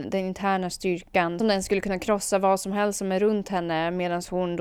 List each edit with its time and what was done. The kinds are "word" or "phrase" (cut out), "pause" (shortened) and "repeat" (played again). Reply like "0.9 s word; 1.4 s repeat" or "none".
1.4 s phrase